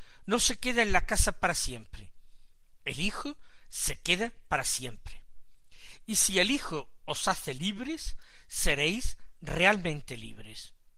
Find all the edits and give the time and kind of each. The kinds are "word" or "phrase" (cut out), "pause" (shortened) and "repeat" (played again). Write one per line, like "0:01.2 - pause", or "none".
none